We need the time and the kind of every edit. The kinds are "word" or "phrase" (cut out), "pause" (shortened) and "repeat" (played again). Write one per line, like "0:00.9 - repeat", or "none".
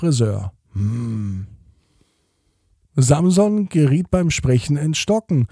none